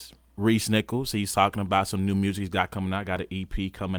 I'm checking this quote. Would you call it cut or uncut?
uncut